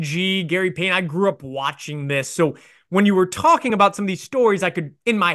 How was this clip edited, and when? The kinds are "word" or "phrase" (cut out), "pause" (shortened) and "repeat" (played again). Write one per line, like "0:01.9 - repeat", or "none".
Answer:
none